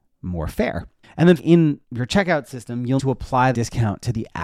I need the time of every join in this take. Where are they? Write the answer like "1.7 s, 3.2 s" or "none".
1.0 s, 1.4 s, 1.8 s, 3.0 s, 3.5 s